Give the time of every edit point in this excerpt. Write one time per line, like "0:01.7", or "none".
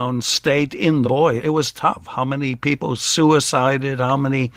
0:01.0
0:01.4